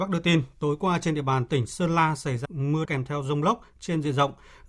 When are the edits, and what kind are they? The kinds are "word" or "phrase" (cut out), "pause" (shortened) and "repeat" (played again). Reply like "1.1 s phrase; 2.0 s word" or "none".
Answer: 2.4 s phrase; 2.8 s word